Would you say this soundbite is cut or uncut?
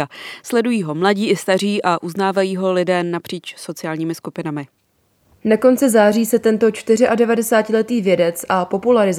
uncut